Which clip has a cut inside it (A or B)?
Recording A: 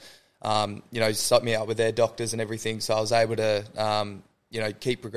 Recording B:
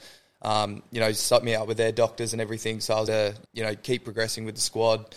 B